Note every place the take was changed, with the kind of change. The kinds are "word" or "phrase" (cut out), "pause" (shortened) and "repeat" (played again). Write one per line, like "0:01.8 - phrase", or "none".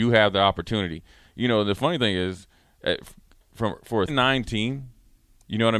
0:04.1 - word